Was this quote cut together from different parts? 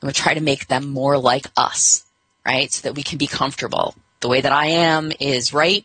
no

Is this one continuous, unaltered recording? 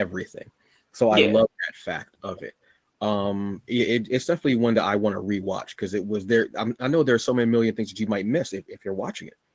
yes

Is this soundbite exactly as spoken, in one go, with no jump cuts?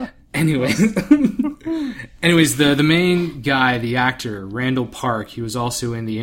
yes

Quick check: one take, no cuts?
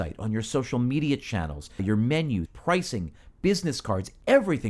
no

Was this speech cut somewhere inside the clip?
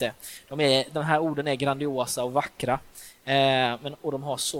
no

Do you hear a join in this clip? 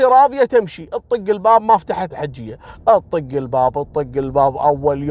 yes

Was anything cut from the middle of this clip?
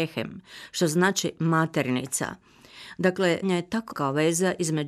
yes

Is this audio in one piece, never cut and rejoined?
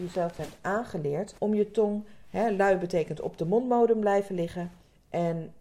no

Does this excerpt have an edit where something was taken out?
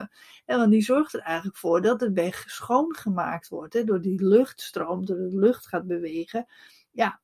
no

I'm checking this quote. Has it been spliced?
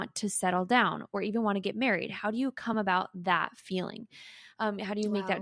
no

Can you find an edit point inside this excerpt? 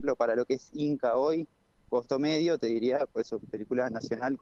no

